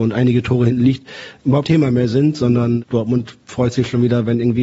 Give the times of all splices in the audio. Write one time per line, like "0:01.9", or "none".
0:01.6